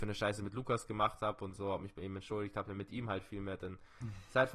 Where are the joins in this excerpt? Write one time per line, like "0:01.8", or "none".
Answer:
none